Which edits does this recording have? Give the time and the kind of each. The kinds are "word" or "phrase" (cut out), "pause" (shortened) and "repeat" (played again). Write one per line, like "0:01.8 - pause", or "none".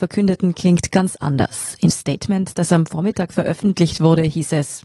0:01.9 - word